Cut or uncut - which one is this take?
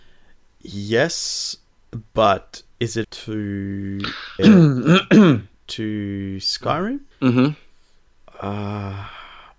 cut